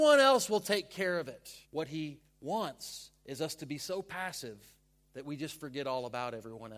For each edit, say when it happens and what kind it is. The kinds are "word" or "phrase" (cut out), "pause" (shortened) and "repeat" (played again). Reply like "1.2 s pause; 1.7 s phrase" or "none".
1.6 s pause